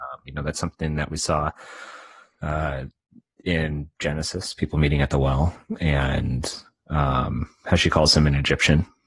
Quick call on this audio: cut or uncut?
uncut